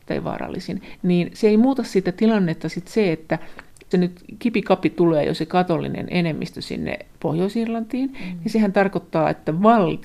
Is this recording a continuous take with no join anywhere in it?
no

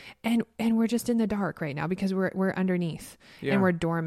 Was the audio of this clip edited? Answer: no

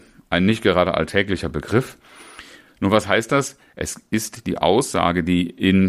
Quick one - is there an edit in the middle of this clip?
no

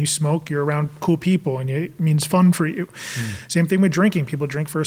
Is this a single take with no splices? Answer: yes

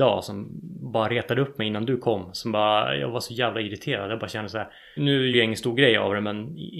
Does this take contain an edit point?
yes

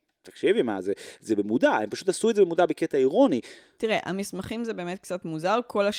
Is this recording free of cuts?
yes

